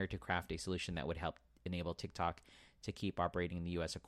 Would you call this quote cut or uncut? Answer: uncut